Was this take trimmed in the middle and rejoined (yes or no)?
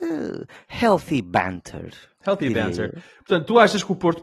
no